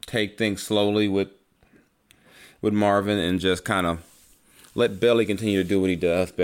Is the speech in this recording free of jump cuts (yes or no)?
yes